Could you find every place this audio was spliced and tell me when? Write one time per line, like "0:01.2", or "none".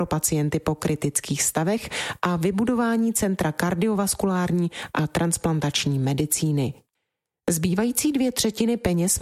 none